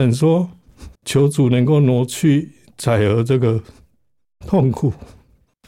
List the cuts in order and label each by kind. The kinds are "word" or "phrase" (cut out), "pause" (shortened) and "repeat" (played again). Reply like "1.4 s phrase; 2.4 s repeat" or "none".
0.9 s pause